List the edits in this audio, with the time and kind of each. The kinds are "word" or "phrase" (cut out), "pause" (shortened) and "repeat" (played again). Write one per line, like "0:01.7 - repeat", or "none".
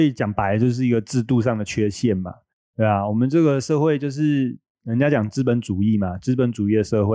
none